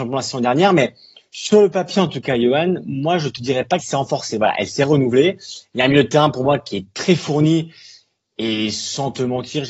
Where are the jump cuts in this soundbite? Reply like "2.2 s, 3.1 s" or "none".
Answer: 3.8 s